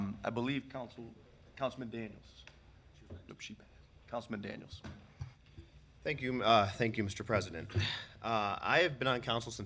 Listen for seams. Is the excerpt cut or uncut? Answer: uncut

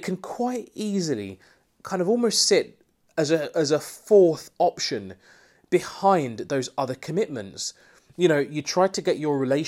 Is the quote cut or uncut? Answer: uncut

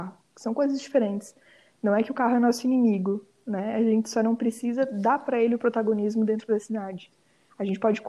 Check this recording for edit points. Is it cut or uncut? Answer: uncut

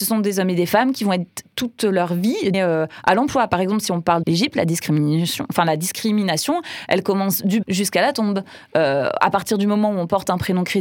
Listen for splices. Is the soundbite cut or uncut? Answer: cut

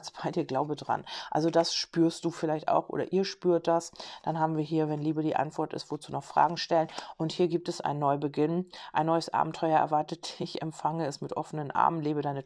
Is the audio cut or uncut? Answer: uncut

